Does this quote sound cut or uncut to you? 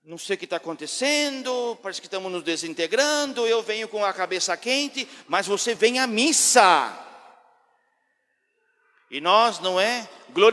uncut